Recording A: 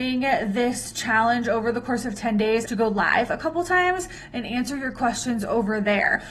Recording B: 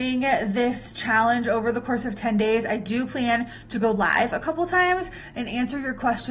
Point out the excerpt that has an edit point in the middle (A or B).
A